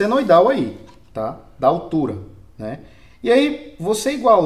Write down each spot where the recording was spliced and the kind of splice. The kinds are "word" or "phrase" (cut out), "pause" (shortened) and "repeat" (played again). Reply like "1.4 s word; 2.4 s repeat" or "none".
none